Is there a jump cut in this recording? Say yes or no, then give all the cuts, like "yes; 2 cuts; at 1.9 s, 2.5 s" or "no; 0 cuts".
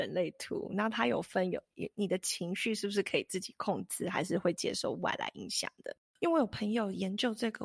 no; 0 cuts